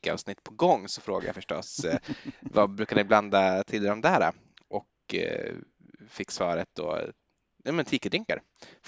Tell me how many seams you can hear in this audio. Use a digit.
0